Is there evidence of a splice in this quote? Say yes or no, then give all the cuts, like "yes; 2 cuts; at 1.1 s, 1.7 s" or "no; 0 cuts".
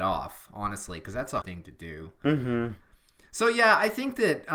yes; 1 cut; at 1.4 s